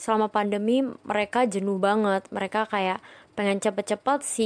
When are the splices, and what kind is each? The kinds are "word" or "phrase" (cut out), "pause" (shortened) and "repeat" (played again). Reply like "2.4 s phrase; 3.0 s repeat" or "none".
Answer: none